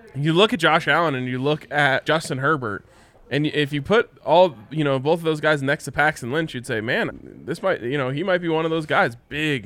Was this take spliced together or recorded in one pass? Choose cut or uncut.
cut